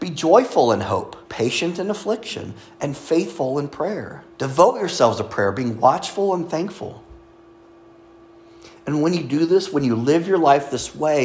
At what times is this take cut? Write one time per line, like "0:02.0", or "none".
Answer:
0:01.2
0:04.3